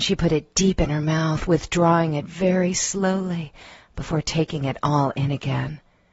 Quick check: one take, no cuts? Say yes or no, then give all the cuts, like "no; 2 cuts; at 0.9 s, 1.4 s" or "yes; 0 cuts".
yes; 0 cuts